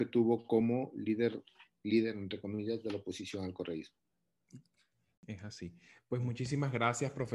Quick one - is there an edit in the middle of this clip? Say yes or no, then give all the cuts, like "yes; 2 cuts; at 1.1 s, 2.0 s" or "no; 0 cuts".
no; 0 cuts